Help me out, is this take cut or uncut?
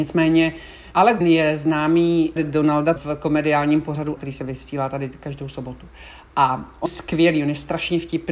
cut